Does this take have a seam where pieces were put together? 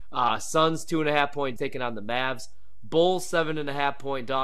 yes; 1 cut; at 1.6 s

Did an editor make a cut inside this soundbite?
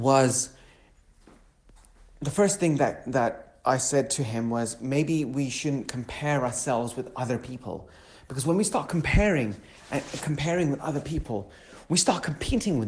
no; 0 cuts

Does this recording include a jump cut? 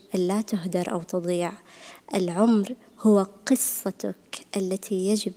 no; 0 cuts

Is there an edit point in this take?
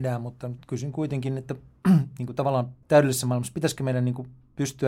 yes; 1 cut; at 2.8 s

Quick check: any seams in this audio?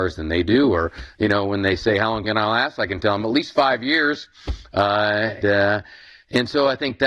yes; 2 cuts; at 2.2 s, 5.4 s

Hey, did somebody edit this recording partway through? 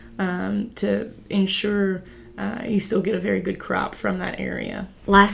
no; 0 cuts

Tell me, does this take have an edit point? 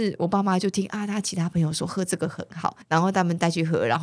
yes; 1 cut; at 2.8 s

